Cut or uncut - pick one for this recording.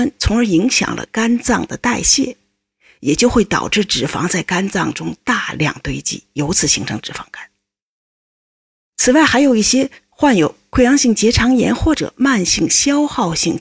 uncut